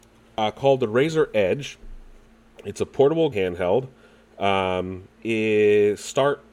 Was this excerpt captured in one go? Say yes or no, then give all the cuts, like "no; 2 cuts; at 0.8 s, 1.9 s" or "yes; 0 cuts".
no; 2 cuts; at 3.3 s, 5.2 s